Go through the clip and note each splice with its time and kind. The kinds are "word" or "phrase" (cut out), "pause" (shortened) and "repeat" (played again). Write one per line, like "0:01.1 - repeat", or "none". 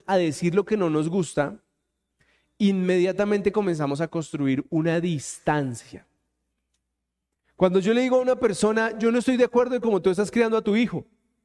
none